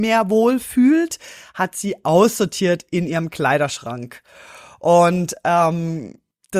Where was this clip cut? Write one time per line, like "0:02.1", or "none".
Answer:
none